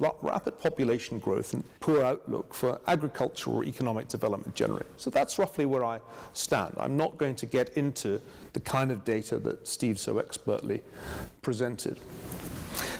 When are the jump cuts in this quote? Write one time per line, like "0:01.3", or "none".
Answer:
0:01.8
0:10.0